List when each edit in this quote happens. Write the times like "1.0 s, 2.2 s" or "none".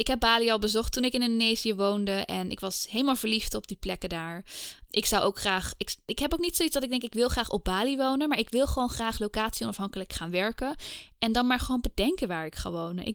none